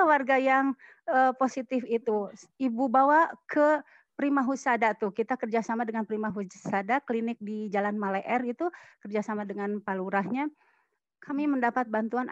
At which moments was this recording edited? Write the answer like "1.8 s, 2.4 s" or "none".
none